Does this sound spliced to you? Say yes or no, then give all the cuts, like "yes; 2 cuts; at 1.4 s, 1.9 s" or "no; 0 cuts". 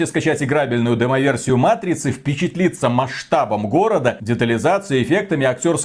no; 0 cuts